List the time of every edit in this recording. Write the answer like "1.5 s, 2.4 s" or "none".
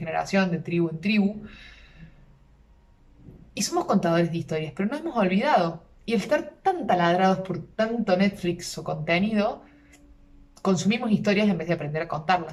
none